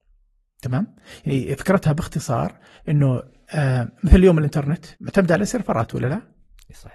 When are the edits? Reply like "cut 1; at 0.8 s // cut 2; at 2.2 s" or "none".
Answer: cut 1; at 2.8 s // cut 2; at 4.9 s